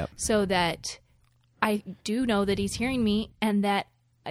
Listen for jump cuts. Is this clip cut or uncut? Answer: cut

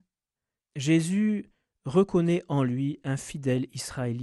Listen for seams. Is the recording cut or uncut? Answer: uncut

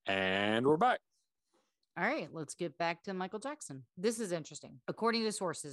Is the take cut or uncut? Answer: cut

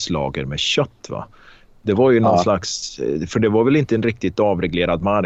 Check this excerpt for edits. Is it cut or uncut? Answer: uncut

